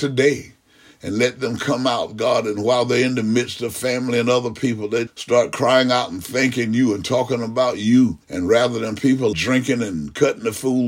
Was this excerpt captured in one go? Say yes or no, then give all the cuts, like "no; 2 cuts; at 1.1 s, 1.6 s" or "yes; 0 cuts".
no; 3 cuts; at 5.1 s, 8.2 s, 9.3 s